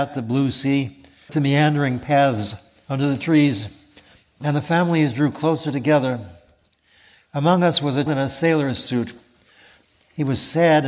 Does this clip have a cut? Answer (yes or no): yes